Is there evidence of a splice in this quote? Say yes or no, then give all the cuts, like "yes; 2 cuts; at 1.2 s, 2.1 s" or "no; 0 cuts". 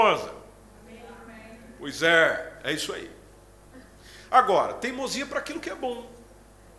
no; 0 cuts